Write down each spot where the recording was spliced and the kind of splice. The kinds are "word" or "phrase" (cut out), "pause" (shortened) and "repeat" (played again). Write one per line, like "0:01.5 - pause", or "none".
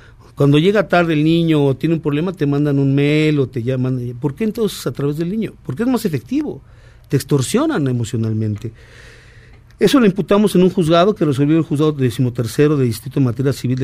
none